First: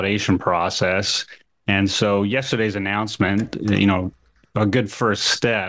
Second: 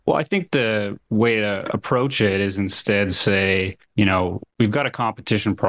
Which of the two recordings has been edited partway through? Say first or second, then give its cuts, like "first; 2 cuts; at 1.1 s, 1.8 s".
second; 3 cuts; at 1.0 s, 3.8 s, 4.5 s